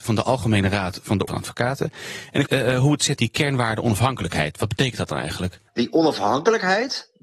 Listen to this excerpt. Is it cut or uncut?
cut